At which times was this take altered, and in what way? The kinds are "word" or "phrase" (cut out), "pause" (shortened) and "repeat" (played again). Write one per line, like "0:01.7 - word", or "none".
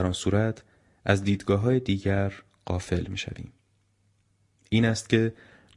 none